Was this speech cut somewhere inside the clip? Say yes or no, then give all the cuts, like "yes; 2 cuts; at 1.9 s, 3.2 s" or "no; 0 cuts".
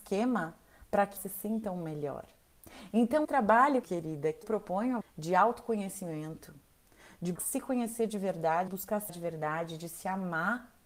yes; 8 cuts; at 1.2 s, 3.2 s, 3.8 s, 4.4 s, 5.0 s, 7.4 s, 8.7 s, 9.1 s